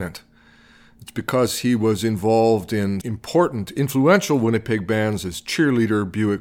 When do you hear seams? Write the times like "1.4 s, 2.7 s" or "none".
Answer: 3.0 s

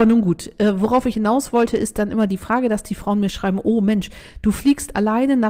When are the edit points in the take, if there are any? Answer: 1.1 s

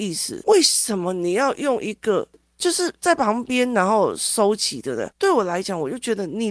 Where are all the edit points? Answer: none

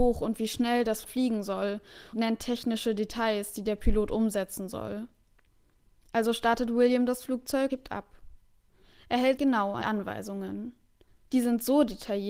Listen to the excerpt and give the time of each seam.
1.0 s, 2.1 s, 7.7 s, 9.4 s, 9.8 s

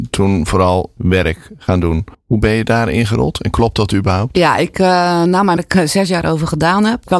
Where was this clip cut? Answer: 1.0 s, 2.1 s, 5.6 s

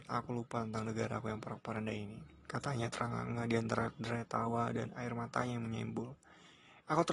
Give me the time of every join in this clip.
none

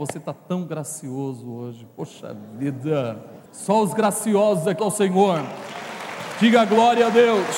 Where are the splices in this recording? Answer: 3.5 s, 4.8 s

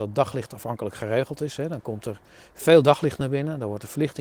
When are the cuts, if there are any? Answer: none

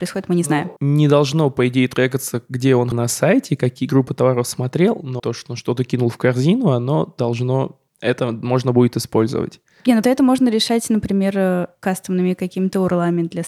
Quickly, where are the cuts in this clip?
2.9 s, 5.2 s, 10.0 s

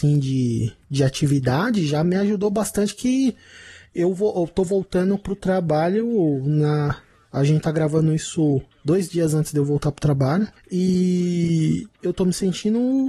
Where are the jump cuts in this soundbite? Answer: none

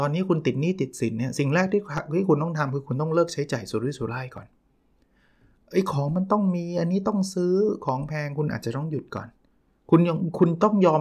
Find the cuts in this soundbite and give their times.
none

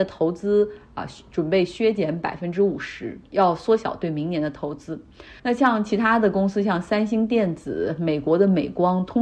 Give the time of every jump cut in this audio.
5.4 s

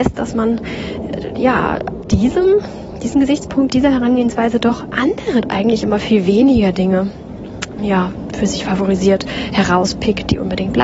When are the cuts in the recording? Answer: 2.0 s, 3.7 s, 5.4 s, 7.8 s

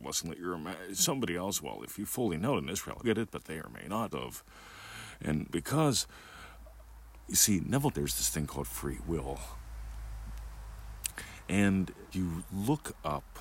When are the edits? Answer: 3.0 s, 3.6 s, 4.1 s, 5.5 s, 7.9 s, 12.1 s

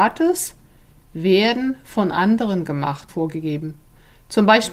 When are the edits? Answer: 3.1 s

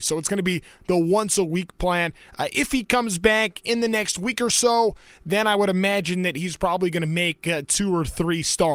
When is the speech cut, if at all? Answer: none

